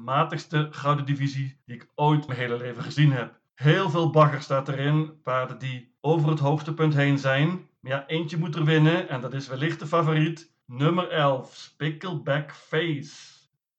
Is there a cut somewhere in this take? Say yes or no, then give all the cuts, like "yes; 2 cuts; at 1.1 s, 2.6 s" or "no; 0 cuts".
yes; 6 cuts; at 1.6 s, 2.3 s, 3.5 s, 6.0 s, 7.8 s, 10.6 s